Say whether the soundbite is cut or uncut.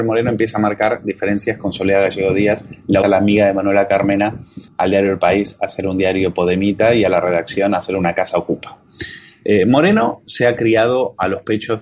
cut